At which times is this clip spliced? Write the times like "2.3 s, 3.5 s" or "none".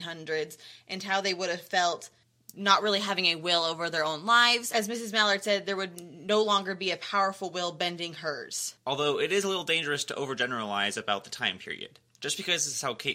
2.2 s, 8.8 s, 12.1 s